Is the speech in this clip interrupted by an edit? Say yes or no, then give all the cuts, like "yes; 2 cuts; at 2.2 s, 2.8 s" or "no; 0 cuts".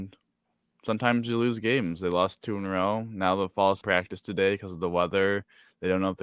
yes; 1 cut; at 3.8 s